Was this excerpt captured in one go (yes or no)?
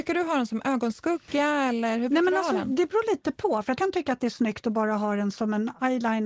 no